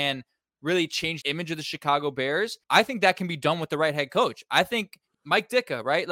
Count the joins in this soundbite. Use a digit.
3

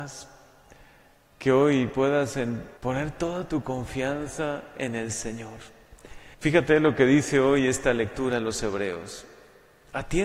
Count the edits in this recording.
2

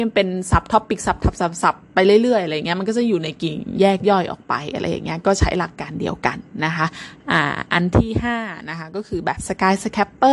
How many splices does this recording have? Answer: 1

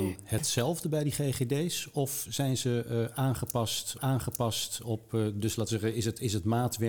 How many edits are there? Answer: 1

